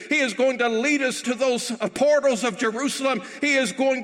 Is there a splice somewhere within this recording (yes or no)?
yes